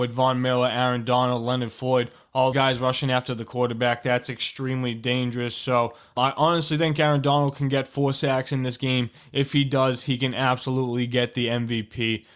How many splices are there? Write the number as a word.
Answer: one